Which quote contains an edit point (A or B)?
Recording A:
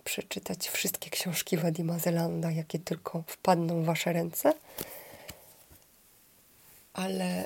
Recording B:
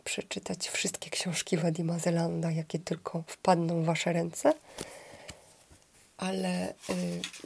B